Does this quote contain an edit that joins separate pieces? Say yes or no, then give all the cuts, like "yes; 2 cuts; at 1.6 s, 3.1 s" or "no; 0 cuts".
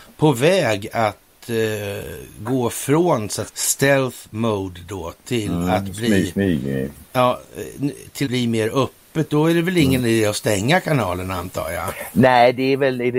yes; 2 cuts; at 3.5 s, 8.2 s